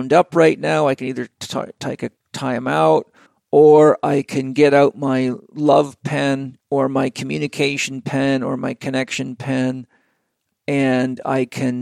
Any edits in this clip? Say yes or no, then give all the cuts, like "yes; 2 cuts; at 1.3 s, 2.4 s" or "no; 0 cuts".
yes; 3 cuts; at 2.2 s, 3.3 s, 6.6 s